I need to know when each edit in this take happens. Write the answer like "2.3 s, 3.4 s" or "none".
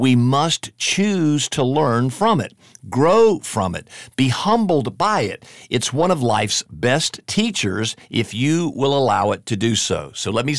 none